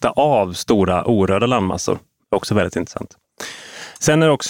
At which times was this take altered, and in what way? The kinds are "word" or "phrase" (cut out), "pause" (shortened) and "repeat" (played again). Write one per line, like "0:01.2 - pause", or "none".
none